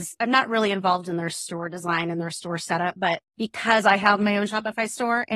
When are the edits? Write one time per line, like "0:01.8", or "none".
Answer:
0:03.3